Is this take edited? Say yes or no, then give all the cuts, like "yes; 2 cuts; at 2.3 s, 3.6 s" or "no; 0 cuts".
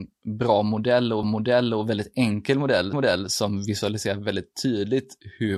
yes; 2 cuts; at 1.2 s, 2.9 s